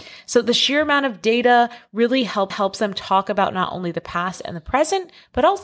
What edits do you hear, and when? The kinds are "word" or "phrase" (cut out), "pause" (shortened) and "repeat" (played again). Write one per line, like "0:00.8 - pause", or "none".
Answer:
0:02.5 - repeat